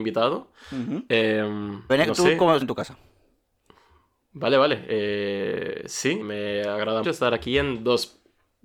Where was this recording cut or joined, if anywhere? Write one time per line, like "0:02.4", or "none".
0:01.9
0:02.6
0:06.2
0:07.0